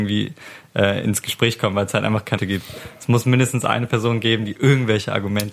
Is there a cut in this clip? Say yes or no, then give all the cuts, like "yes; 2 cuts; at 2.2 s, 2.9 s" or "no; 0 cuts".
yes; 1 cut; at 2.4 s